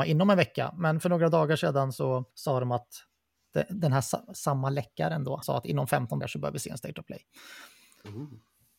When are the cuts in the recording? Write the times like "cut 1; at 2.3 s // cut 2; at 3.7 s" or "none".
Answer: cut 1; at 2.3 s // cut 2; at 5.4 s // cut 3; at 6.2 s